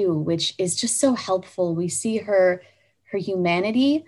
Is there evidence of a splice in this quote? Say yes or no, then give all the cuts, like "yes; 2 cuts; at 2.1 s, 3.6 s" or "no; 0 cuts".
no; 0 cuts